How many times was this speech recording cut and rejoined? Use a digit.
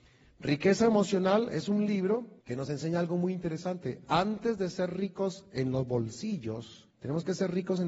2